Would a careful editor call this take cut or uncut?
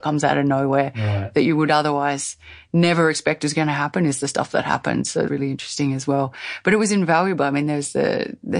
cut